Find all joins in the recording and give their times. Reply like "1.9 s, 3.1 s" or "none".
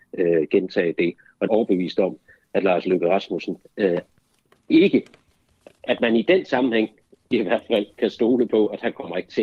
1.5 s